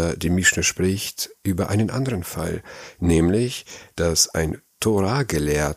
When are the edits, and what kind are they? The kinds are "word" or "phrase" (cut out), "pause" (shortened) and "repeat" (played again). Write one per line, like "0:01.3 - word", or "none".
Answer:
none